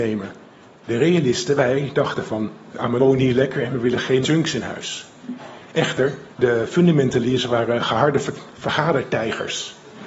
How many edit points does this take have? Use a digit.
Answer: 3